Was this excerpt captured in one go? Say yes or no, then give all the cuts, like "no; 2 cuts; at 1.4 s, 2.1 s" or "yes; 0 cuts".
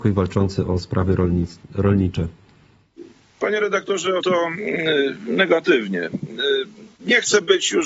no; 1 cut; at 4.2 s